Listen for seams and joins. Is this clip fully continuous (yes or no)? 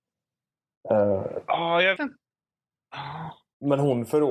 no